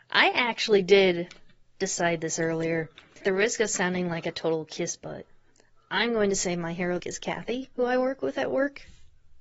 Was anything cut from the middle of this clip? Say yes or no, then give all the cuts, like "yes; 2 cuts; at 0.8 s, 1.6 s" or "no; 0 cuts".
yes; 2 cuts; at 3.2 s, 7.0 s